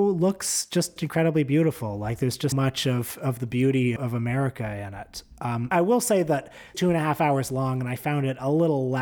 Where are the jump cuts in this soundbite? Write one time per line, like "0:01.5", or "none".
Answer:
0:01.0
0:02.5
0:04.0
0:05.7
0:06.7